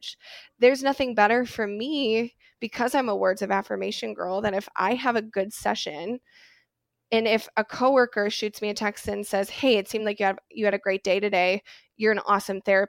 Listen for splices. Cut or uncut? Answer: uncut